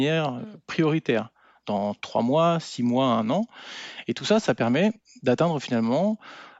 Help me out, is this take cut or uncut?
uncut